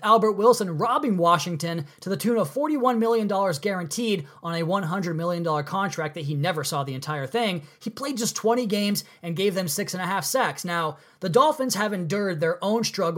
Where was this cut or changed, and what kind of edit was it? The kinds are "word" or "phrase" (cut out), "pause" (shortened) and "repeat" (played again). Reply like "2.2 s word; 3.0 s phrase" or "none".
none